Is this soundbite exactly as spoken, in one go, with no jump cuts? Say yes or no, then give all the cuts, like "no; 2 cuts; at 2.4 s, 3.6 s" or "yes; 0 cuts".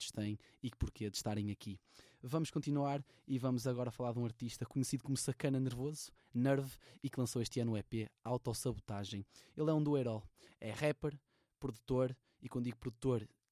yes; 0 cuts